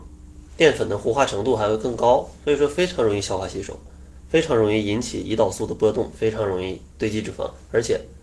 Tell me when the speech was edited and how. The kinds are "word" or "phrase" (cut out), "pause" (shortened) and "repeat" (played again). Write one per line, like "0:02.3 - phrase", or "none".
0:06.9 - pause